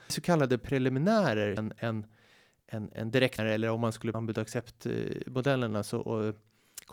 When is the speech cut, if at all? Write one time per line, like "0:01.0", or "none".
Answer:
0:01.6
0:03.4
0:04.1